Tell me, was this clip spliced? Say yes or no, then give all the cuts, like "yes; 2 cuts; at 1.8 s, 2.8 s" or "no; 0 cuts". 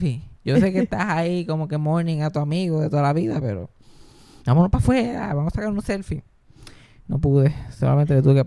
no; 0 cuts